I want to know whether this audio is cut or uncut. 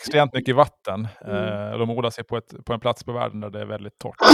uncut